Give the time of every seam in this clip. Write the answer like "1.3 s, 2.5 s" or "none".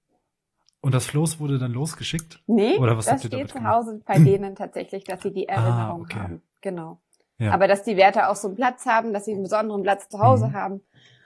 none